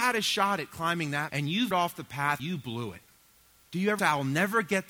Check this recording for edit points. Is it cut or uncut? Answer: cut